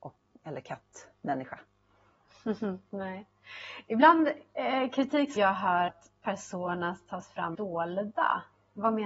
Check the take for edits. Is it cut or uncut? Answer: cut